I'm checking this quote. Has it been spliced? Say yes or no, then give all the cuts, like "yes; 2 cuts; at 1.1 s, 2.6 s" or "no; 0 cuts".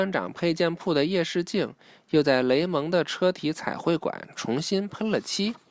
no; 0 cuts